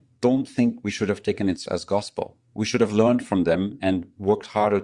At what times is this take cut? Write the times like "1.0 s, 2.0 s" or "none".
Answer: 1.7 s